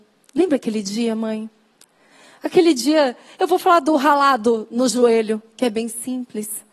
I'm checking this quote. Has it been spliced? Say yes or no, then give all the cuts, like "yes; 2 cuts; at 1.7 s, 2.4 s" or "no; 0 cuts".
no; 0 cuts